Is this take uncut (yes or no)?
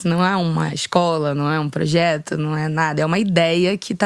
yes